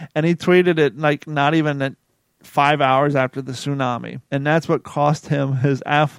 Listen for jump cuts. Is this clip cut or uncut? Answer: cut